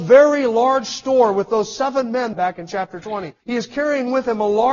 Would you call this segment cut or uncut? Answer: cut